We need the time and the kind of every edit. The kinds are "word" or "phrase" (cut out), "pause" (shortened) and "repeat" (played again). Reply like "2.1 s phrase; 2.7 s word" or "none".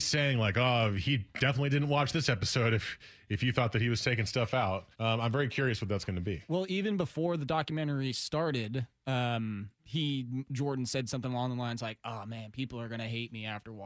4.9 s pause; 9.8 s pause

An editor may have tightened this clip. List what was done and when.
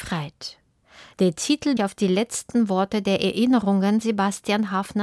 1.8 s phrase; 4.0 s word

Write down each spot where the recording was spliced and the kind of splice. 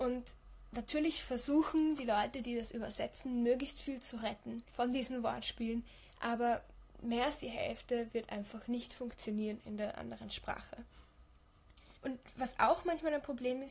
12.0 s pause

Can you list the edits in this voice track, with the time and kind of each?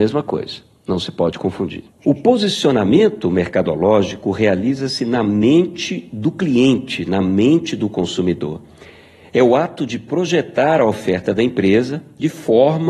1.9 s pause

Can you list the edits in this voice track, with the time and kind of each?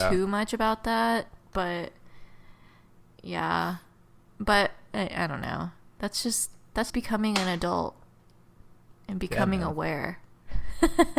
6.9 s word

